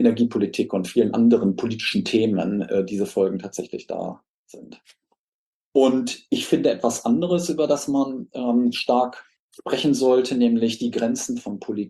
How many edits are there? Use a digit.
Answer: 0